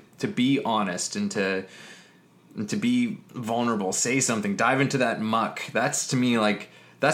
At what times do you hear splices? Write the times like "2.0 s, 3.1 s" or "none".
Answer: none